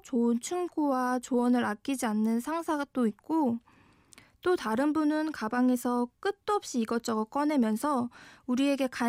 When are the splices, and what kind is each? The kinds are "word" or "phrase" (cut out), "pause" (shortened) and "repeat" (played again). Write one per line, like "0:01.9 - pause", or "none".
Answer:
none

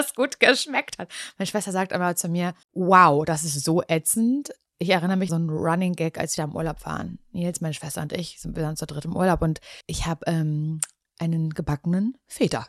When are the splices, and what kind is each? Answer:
0:02.6 - pause
0:05.3 - phrase
0:06.4 - phrase
0:09.8 - pause

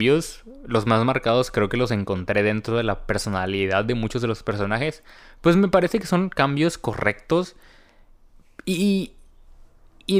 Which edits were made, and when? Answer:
none

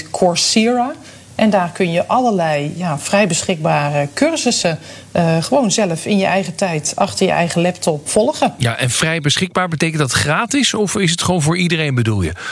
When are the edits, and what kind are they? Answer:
0:08.1 - word

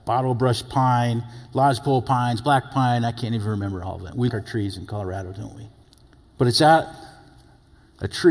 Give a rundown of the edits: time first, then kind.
0:04.3 - word
0:05.8 - pause

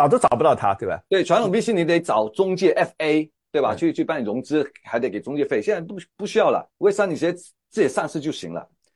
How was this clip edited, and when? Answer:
0:06.7 - pause

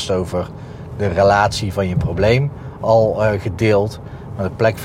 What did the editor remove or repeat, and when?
none

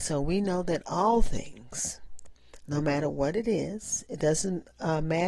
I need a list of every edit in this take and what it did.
none

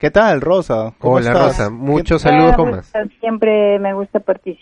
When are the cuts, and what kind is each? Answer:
0:02.6 - word

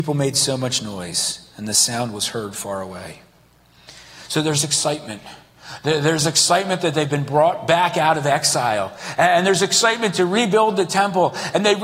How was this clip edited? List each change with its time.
none

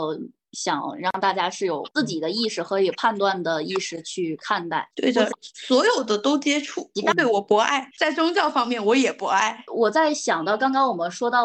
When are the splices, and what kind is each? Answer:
0:07.9 - pause

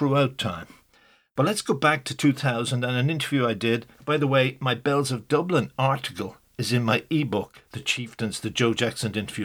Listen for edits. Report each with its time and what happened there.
0:03.9 - pause
0:07.7 - pause

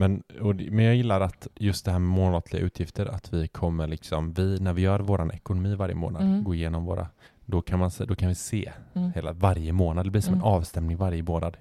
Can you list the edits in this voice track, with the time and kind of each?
0:01.5 - pause

